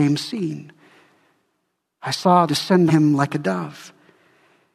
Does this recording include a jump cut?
yes; 2 cuts; at 2.5 s, 2.9 s

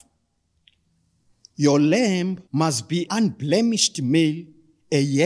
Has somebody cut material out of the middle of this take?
yes; 2 cuts; at 2.5 s, 3.1 s

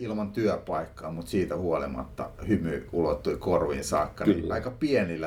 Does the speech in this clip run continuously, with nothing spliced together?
yes; 0 cuts

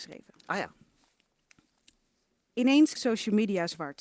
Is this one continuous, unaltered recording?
no; 1 cut; at 3.0 s

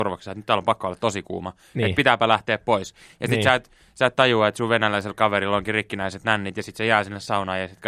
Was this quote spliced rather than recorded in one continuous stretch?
no; 0 cuts

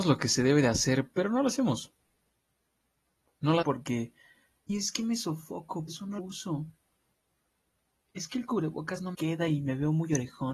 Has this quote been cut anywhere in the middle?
yes; 5 cuts; at 3.6 s, 4.7 s, 5.9 s, 6.2 s, 9.1 s

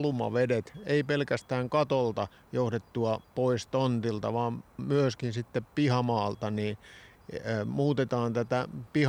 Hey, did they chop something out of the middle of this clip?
no; 0 cuts

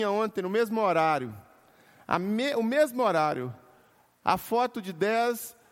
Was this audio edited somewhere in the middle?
no; 0 cuts

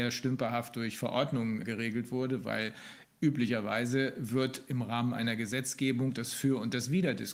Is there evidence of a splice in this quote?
yes; 1 cut; at 1.6 s

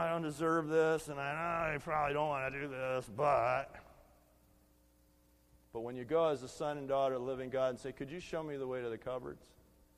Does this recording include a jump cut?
no; 0 cuts

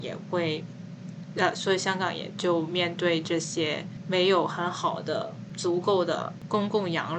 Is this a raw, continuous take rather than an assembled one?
yes; 0 cuts

